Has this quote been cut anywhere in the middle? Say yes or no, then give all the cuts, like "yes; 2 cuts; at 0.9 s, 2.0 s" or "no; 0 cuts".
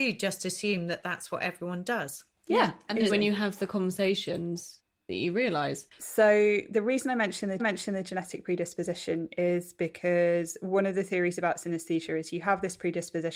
yes; 2 cuts; at 3.1 s, 7.6 s